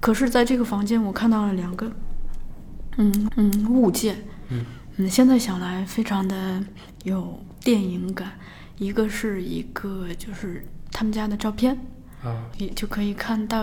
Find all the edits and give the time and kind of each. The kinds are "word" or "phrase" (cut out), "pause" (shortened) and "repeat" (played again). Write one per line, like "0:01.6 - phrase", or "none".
0:03.3 - repeat
0:12.5 - word

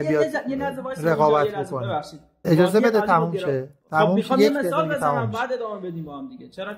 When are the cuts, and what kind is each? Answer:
0:02.4 - word

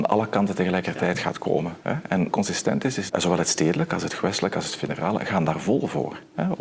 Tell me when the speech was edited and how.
0:02.3 - phrase
0:03.1 - phrase

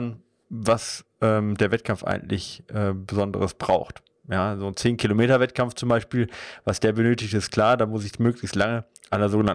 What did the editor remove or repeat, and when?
none

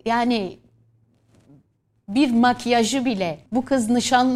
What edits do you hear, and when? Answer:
0:03.5 - pause

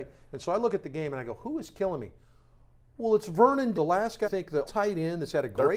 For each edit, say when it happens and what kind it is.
0:03.7 - word
0:04.2 - word
0:04.6 - word

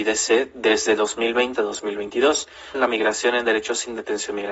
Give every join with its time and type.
0:01.6 - word
0:02.7 - phrase

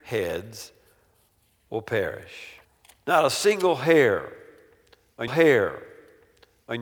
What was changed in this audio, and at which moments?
0:02.6 - pause
0:05.3 - repeat

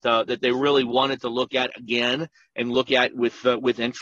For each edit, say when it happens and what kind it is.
none

